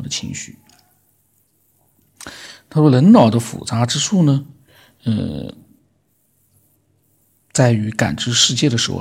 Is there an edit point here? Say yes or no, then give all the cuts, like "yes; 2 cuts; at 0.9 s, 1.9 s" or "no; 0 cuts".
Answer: no; 0 cuts